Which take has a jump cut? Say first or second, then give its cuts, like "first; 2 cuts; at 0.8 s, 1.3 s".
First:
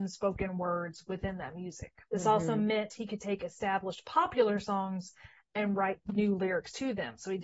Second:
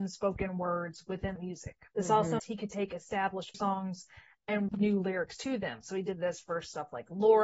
second; 4 cuts; at 1.4 s, 2.4 s, 3.5 s, 4.7 s